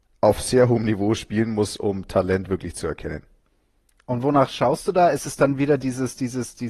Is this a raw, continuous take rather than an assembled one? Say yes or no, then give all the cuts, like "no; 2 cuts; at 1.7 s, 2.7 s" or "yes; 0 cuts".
yes; 0 cuts